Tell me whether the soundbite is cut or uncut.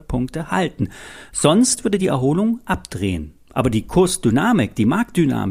uncut